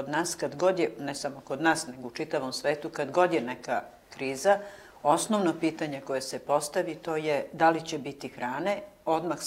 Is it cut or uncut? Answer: uncut